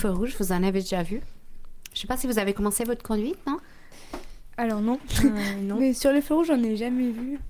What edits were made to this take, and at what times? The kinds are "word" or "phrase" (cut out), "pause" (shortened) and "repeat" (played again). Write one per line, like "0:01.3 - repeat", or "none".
none